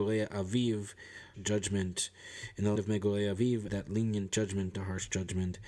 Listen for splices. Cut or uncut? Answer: cut